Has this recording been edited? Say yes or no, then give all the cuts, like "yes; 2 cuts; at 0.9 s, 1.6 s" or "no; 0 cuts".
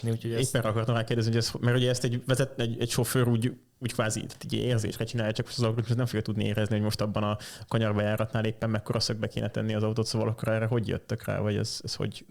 no; 0 cuts